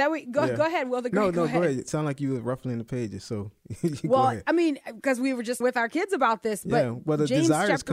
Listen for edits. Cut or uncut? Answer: cut